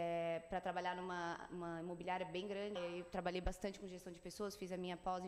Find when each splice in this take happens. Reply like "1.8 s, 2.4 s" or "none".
2.8 s